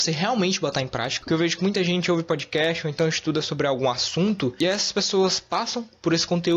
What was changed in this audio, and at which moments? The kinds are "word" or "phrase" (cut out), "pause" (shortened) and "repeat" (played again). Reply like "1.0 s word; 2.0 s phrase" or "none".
none